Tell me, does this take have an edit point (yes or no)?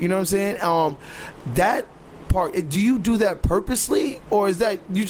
no